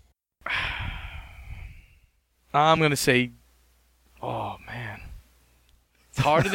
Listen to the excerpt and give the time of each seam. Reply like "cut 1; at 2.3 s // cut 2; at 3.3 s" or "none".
none